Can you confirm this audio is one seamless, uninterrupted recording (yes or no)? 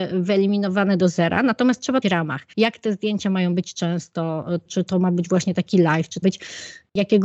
no